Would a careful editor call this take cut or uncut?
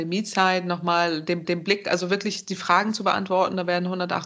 cut